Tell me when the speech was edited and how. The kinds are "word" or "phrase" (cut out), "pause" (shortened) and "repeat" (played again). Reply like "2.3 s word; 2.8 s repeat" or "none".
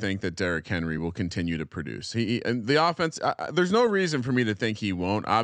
none